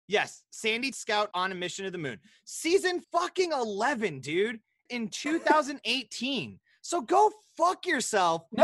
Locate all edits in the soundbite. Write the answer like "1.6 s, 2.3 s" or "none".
0.9 s, 1.3 s, 3.0 s, 4.9 s